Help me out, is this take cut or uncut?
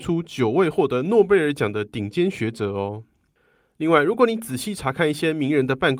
uncut